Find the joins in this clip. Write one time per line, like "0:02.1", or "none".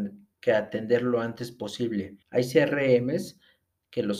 0:02.2